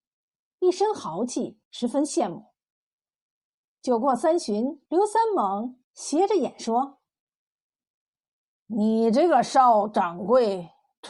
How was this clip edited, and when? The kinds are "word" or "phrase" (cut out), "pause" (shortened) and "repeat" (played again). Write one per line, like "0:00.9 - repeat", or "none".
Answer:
0:01.6 - pause
0:04.9 - pause
0:05.8 - pause